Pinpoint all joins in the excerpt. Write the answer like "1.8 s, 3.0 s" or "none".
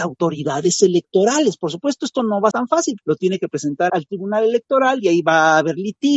2.5 s, 3.0 s, 3.9 s